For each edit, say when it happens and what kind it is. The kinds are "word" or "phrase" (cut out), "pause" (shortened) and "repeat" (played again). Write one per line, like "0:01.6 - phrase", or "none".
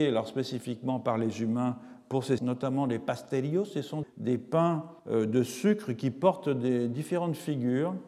0:02.4 - word
0:04.0 - word
0:05.0 - pause